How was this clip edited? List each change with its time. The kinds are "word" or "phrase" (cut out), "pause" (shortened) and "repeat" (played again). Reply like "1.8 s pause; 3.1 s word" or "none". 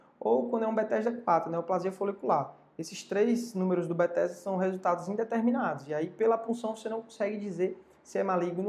none